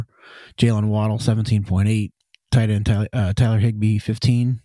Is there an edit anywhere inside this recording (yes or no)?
no